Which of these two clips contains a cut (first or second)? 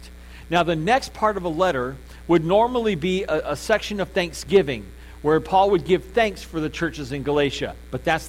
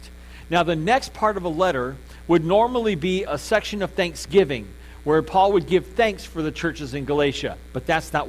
second